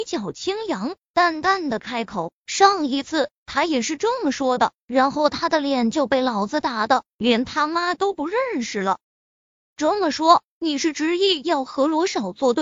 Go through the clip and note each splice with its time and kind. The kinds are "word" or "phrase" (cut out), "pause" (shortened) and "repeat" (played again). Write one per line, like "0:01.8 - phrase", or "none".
0:09.0 - pause